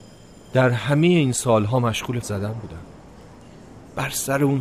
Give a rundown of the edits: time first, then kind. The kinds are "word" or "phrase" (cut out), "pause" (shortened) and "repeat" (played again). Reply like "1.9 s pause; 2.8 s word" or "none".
2.2 s word